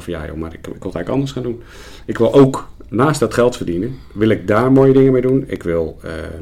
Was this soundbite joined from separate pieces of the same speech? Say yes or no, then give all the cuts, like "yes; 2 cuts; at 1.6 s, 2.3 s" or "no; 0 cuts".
no; 0 cuts